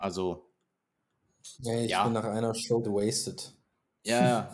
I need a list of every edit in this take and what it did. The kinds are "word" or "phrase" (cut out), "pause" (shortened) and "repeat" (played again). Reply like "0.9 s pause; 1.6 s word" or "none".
1.5 s word; 2.8 s word